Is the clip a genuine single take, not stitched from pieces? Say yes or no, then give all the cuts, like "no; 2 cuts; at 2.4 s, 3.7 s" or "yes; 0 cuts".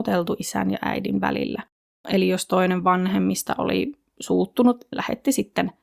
no; 2 cuts; at 1.8 s, 4.9 s